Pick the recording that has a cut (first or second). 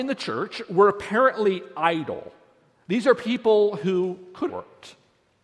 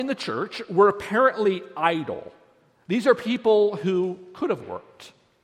first